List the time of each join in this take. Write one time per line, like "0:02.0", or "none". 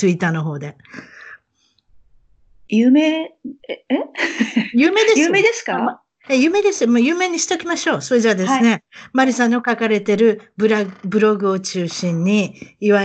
0:03.6